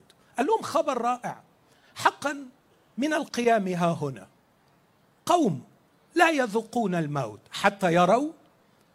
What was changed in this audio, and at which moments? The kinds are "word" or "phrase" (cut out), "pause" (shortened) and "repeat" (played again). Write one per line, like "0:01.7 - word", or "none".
none